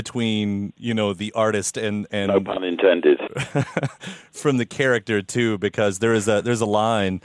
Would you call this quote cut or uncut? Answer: uncut